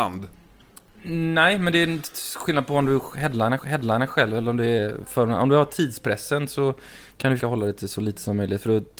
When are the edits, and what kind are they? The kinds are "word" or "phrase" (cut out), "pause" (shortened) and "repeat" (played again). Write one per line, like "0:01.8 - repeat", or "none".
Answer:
0:03.6 - repeat
0:07.4 - word